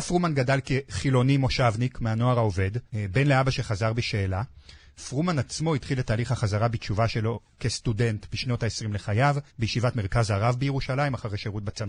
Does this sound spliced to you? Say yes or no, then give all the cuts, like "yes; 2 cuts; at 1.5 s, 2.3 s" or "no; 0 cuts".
yes; 2 cuts; at 2.9 s, 9.5 s